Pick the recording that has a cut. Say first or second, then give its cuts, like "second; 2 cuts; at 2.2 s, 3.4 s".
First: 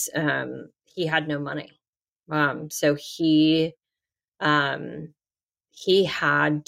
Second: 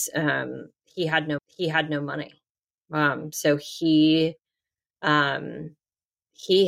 second; 1 cut; at 1.4 s